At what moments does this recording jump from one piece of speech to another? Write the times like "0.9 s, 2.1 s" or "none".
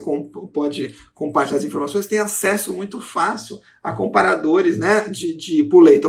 none